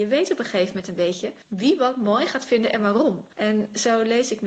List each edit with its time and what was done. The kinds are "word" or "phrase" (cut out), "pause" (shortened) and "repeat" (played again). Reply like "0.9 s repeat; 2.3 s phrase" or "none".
1.4 s pause; 3.3 s pause